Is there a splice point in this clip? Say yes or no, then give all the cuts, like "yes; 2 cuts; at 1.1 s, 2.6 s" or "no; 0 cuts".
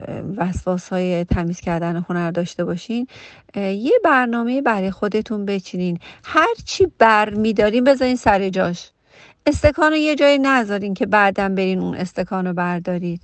no; 0 cuts